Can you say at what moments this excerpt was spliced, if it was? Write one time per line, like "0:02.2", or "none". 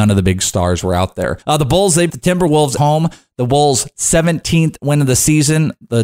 0:01.4
0:02.1
0:02.8

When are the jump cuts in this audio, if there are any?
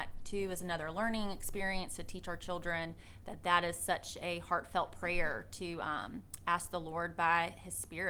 none

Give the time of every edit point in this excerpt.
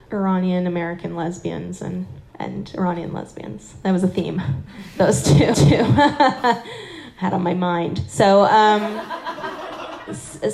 0:02.3
0:05.5
0:07.3

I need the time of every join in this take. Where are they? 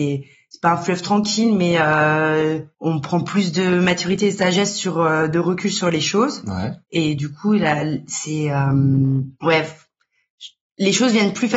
0:02.7
0:06.8
0:09.3

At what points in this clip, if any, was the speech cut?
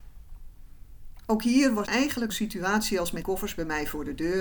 0:01.9
0:02.3
0:03.2

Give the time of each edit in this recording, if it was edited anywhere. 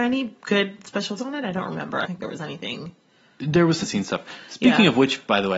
0:01.2
0:02.1
0:03.8

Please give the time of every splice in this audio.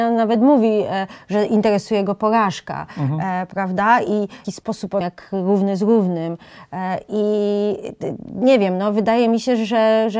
0:04.4
0:05.0

